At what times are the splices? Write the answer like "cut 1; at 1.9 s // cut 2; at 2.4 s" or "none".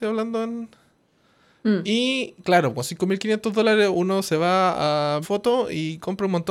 cut 1; at 5.2 s

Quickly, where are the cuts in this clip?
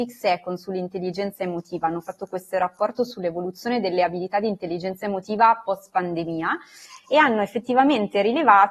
none

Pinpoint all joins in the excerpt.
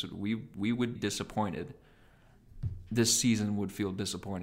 cut 1; at 1.0 s

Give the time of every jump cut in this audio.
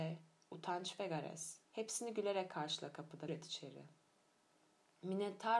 cut 1; at 1.7 s // cut 2; at 3.3 s

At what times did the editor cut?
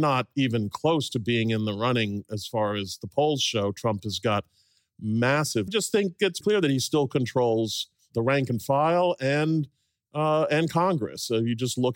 cut 1; at 5.7 s // cut 2; at 6.4 s

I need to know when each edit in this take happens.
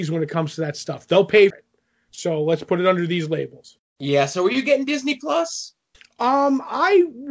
cut 1; at 1.5 s // cut 2; at 3.9 s // cut 3; at 5.9 s

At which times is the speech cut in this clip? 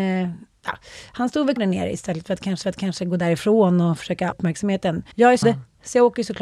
cut 1; at 1.6 s // cut 2; at 2.6 s // cut 3; at 4.3 s // cut 4; at 5.1 s // cut 5; at 5.4 s

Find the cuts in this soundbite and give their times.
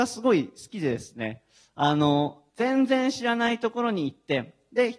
cut 1; at 2.5 s

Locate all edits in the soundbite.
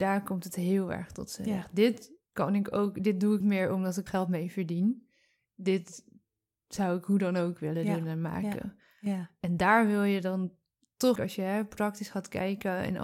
cut 1; at 3.4 s // cut 2; at 4.1 s // cut 3; at 11.2 s

